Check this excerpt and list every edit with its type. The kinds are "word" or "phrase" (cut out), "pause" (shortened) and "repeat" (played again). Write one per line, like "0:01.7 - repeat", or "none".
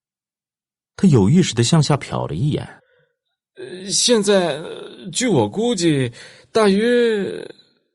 0:02.8 - pause